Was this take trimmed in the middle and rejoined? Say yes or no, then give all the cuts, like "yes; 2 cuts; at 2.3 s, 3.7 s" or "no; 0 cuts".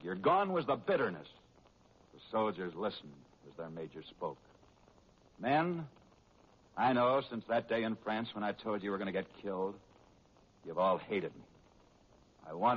no; 0 cuts